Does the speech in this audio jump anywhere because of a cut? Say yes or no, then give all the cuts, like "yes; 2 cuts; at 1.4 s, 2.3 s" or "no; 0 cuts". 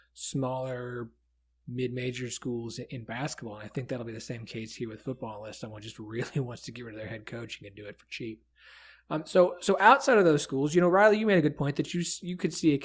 no; 0 cuts